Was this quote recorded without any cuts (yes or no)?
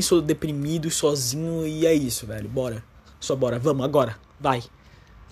yes